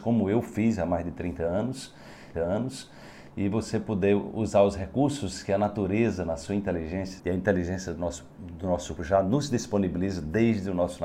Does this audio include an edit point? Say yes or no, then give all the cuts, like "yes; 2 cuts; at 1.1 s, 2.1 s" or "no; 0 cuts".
yes; 4 cuts; at 2.3 s, 7.2 s, 8.3 s, 9.0 s